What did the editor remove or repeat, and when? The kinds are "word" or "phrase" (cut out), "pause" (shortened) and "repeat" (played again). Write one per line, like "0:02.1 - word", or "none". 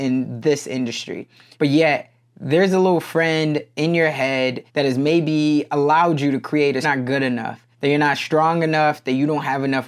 0:04.7 - pause
0:06.8 - phrase
0:07.7 - pause